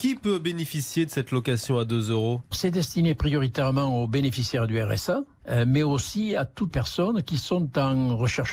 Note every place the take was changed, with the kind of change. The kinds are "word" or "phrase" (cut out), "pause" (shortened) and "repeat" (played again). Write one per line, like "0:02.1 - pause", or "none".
0:02.5 - word
0:06.7 - word